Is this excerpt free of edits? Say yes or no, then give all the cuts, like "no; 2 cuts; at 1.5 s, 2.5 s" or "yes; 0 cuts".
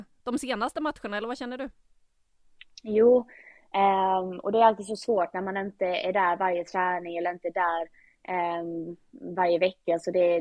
yes; 0 cuts